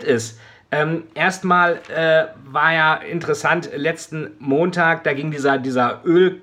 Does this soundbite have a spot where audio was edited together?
no; 0 cuts

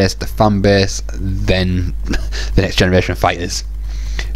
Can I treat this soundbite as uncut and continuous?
no; 1 cut; at 2.0 s

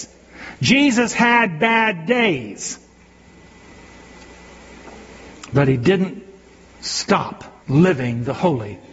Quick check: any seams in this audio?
yes; 1 cut; at 7.6 s

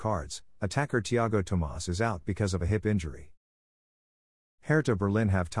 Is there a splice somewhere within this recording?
no; 0 cuts

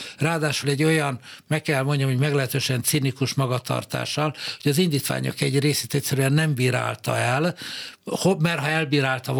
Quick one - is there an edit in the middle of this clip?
no; 0 cuts

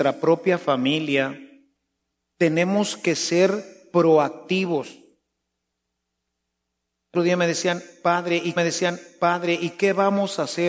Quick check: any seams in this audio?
yes; 2 cuts; at 7.1 s, 8.6 s

